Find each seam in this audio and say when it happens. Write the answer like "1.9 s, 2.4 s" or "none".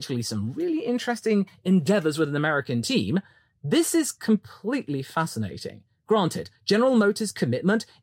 6.6 s